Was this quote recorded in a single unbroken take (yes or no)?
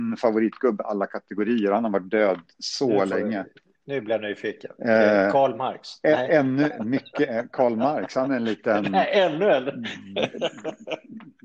yes